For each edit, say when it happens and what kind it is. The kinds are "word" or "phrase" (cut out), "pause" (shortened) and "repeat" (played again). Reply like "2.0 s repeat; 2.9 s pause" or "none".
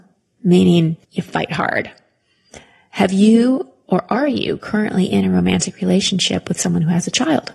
1.0 s pause